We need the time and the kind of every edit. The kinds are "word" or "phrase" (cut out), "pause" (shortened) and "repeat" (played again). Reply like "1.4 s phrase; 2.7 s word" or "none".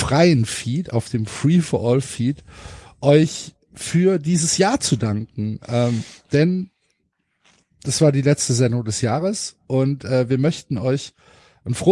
none